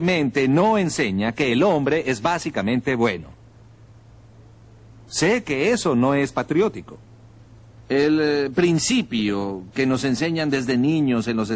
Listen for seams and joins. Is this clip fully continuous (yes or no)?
yes